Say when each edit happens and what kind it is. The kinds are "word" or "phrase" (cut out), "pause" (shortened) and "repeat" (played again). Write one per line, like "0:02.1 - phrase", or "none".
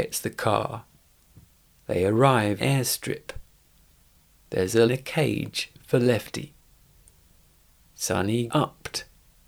0:01.0 - pause
0:02.6 - phrase
0:04.9 - phrase
0:08.5 - word